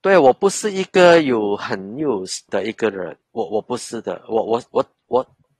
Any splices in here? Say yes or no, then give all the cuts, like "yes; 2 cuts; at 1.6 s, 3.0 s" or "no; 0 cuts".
yes; 2 cuts; at 2.5 s, 3.2 s